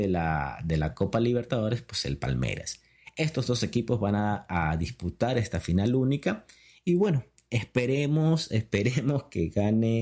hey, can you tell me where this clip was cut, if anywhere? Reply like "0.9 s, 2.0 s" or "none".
none